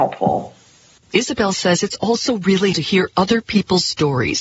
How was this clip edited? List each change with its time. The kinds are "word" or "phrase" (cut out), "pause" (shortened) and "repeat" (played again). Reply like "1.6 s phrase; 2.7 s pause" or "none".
2.7 s word